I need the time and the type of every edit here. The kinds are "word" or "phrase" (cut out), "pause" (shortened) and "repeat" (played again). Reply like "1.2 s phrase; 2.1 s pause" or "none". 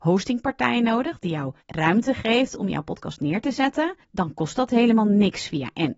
1.6 s pause; 4.0 s pause